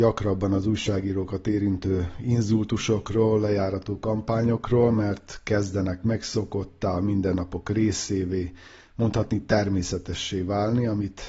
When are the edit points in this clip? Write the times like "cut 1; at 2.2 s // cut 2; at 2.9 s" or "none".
none